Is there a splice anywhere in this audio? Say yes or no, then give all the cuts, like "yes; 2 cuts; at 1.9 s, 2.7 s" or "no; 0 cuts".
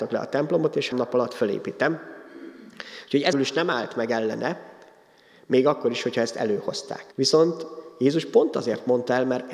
yes; 3 cuts; at 0.9 s, 3.3 s, 7.1 s